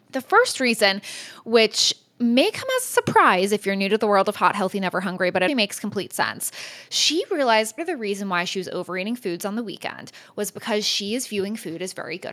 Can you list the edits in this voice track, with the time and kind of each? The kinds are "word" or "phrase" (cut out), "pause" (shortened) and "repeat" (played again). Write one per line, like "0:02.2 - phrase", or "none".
0:05.5 - word
0:07.8 - word